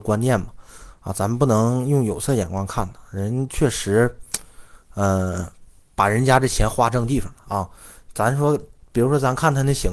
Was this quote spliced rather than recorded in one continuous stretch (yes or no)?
no